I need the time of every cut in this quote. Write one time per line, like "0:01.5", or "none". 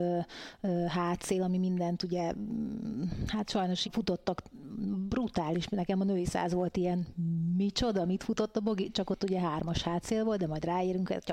0:03.8